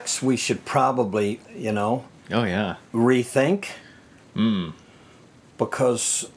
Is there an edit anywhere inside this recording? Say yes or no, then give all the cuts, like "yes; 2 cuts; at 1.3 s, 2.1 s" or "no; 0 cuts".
yes; 2 cuts; at 1.4 s, 2.2 s